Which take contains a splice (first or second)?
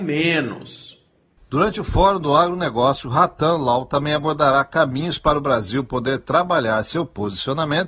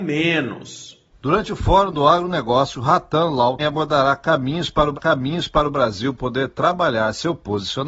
second